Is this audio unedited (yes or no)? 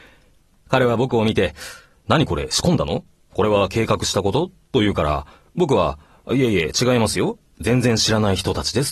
yes